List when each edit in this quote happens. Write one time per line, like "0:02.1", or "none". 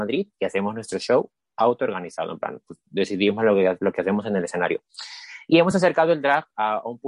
none

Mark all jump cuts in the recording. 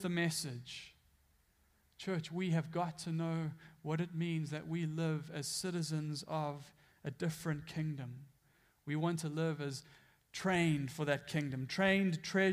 none

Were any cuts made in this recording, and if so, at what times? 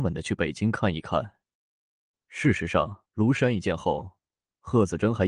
0:03.1

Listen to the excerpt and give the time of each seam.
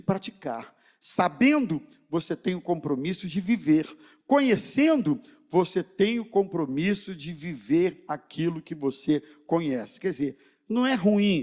none

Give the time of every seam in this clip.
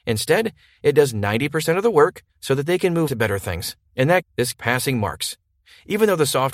0:02.3
0:03.1
0:03.9
0:04.2
0:04.5

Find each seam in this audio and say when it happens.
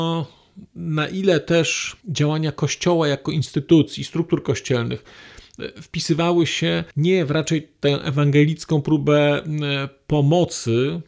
0:02.0
0:06.9

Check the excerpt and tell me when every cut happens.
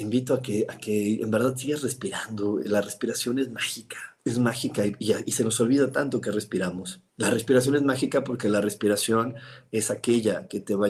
0:04.2
0:07.1

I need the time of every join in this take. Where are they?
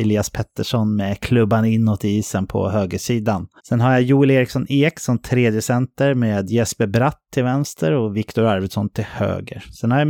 0:03.6

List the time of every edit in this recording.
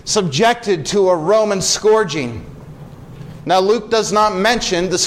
none

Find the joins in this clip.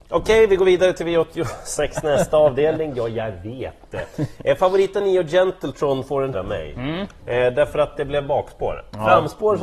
0:05.0
0:06.3

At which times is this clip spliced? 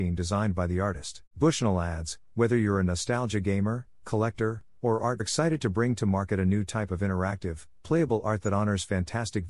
0:01.3
0:05.2

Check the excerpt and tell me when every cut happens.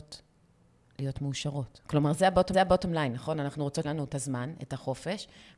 0:02.5
0:03.8

